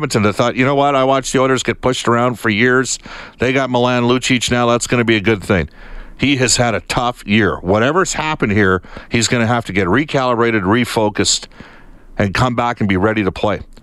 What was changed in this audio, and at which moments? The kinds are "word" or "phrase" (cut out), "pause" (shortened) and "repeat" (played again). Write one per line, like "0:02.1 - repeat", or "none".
none

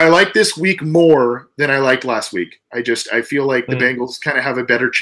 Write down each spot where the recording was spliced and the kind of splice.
none

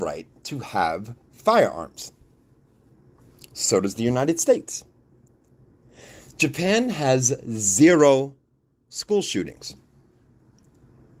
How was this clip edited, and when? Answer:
none

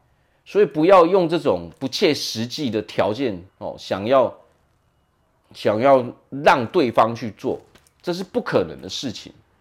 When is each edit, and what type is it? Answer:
0:03.5 - pause

